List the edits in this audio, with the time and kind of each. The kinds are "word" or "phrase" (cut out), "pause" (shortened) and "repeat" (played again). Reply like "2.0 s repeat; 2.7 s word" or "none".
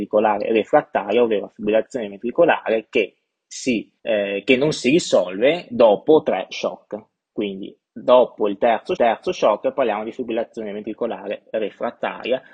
4.0 s pause; 5.7 s word; 7.9 s pause; 9.0 s repeat